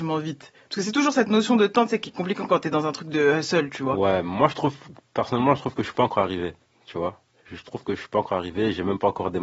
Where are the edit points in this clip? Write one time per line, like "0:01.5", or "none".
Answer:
none

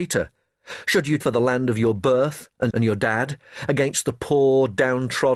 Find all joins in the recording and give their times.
0:01.2
0:02.7

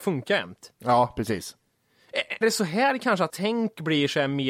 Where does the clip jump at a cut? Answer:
0:02.4
0:03.3

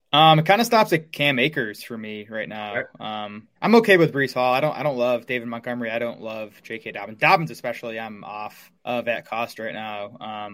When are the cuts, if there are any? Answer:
0:03.6
0:08.7

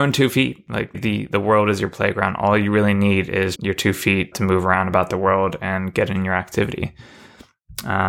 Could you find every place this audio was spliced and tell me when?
0:00.9
0:03.6
0:04.3

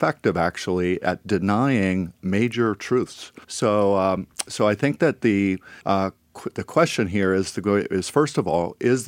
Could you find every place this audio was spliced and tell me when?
0:02.2
0:03.4
0:05.8

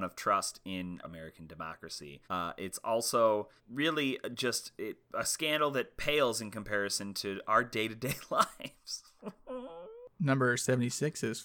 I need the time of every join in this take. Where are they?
0:01.0
0:02.2
0:03.6
0:05.0

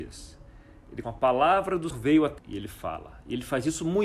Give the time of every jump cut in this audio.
0:01.0
0:01.9
0:02.4

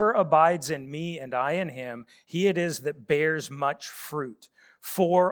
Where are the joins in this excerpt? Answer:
none

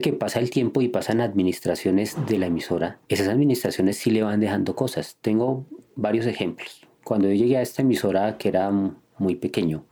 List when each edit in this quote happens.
0:03.0

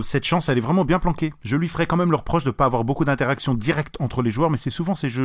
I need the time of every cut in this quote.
none

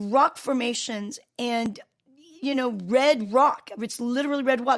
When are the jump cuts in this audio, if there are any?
none

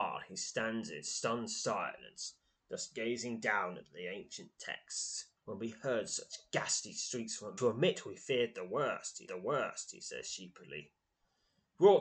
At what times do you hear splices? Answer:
0:05.4
0:07.6
0:09.3

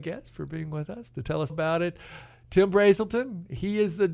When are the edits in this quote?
0:01.5

